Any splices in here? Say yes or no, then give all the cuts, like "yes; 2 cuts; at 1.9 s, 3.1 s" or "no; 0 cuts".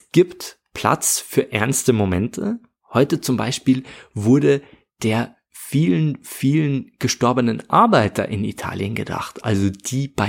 no; 0 cuts